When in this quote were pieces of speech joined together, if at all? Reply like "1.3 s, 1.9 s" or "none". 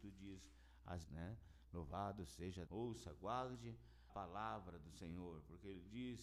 1.0 s, 2.7 s, 4.1 s